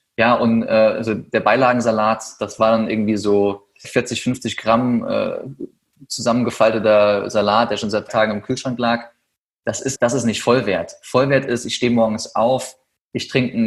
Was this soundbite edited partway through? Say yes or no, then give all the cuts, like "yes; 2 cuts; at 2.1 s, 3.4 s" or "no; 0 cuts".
yes; 3 cuts; at 3.8 s, 8.1 s, 10.0 s